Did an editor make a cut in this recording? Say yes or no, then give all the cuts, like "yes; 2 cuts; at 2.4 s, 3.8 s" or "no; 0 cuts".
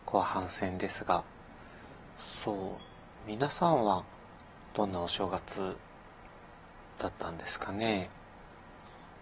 no; 0 cuts